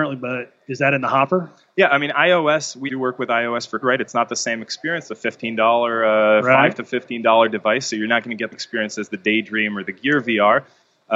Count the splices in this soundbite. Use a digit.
3